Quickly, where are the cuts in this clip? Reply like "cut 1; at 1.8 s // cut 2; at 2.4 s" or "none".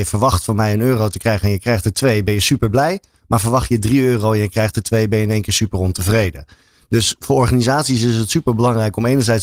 none